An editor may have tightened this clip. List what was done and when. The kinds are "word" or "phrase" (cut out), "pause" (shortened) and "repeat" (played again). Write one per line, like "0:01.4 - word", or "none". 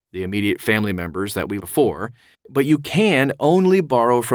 0:01.6 - word
0:02.3 - pause